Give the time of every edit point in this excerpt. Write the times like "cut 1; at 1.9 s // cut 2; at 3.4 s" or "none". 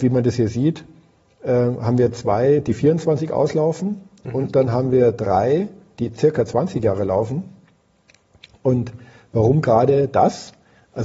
none